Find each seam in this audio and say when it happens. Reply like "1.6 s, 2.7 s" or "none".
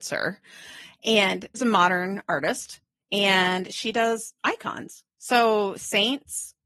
1.5 s, 5.1 s

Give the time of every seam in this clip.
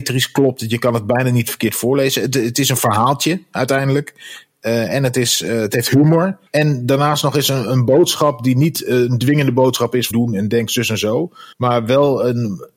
6.5 s, 10.1 s, 11.5 s

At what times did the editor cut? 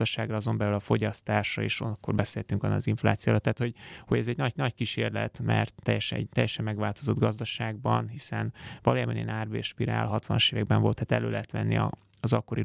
4.6 s, 11.0 s

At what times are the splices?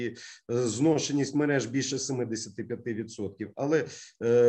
none

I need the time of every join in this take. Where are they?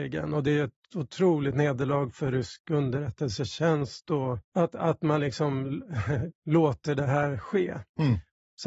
4.5 s, 6.4 s

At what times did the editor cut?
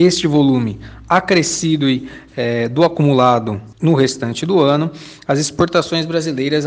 3.7 s

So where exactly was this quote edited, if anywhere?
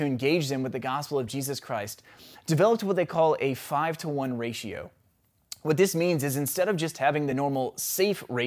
none

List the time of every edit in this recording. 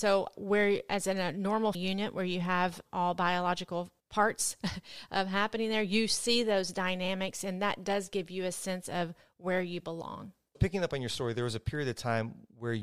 1.7 s, 10.5 s

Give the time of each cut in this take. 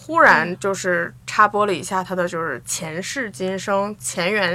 1.2 s

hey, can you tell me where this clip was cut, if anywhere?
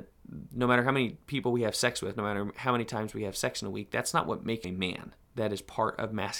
4.6 s, 5.2 s

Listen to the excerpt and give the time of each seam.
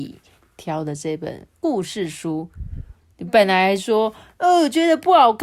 none

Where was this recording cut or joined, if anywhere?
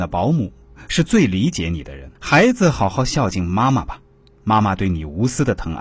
2.1 s

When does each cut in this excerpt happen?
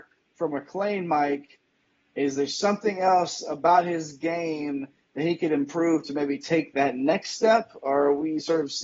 none

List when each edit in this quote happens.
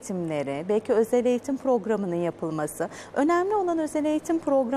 none

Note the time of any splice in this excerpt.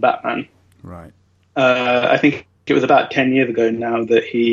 1.3 s

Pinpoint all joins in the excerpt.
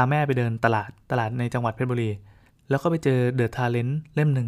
1.0 s, 2.5 s

